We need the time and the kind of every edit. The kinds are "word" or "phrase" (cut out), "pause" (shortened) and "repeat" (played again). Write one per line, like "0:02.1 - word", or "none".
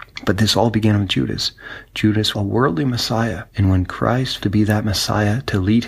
0:02.3 - word
0:03.5 - pause
0:04.4 - word